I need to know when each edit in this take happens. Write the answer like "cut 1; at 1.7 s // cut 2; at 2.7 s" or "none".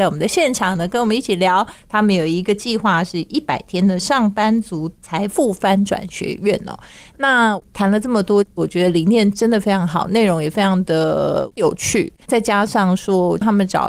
cut 1; at 12.2 s